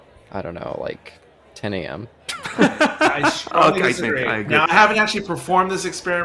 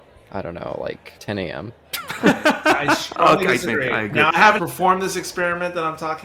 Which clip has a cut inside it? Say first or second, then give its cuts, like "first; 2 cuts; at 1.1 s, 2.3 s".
second; 2 cuts; at 1.2 s, 4.6 s